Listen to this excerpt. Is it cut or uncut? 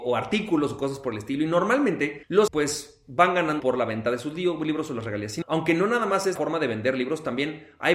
cut